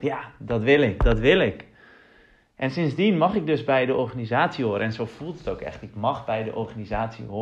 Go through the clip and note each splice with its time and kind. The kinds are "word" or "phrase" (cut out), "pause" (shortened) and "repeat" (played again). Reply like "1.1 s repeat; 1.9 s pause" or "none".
none

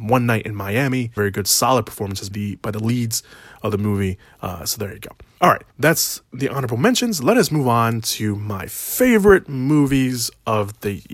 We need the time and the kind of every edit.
1.2 s word; 2.3 s phrase; 5.7 s pause

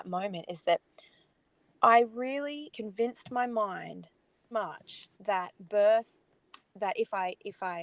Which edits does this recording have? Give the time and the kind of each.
2.7 s word; 4.5 s word; 5.1 s pause

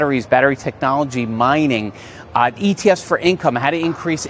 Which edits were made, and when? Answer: none

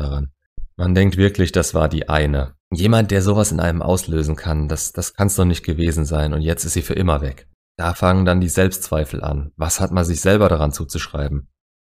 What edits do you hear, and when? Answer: 2.6 s pause

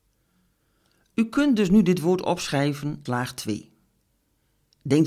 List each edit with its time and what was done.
3.1 s word

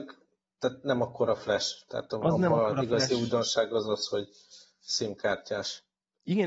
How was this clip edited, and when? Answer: none

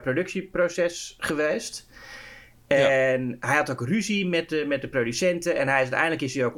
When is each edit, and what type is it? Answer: none

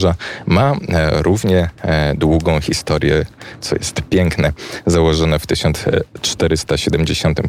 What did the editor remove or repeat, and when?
none

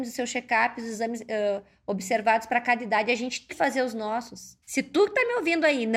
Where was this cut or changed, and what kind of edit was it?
3.5 s word; 4.6 s pause

